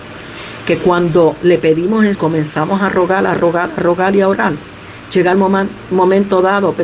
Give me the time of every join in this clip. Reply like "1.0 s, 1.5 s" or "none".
2.1 s